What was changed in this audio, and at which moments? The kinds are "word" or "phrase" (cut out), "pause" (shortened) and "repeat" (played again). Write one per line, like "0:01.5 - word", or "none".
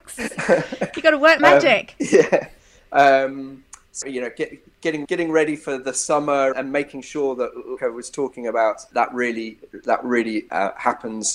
0:01.4 - word
0:02.0 - word
0:04.0 - word
0:05.0 - word
0:06.5 - word
0:07.8 - word
0:08.1 - word
0:08.9 - word